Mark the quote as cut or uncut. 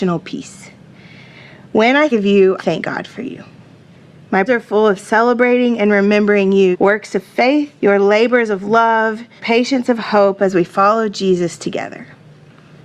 cut